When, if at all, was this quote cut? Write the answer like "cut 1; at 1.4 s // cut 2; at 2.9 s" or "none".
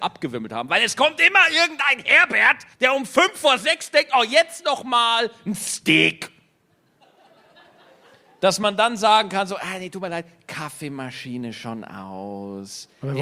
cut 1; at 2.7 s